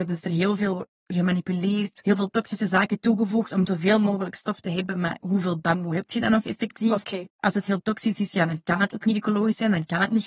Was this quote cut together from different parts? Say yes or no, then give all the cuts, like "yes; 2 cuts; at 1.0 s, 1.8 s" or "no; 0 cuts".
yes; 1 cut; at 7.3 s